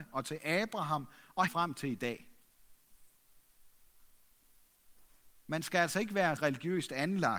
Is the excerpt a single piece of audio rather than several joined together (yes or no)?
no